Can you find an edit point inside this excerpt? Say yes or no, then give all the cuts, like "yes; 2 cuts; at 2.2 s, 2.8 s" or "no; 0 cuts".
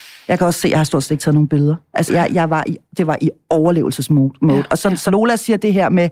yes; 2 cuts; at 2.1 s, 5.1 s